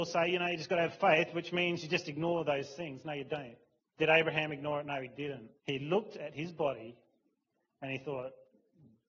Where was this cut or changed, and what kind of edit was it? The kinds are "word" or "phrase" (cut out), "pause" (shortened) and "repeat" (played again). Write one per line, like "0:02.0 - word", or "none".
0:03.8 - pause
0:05.6 - pause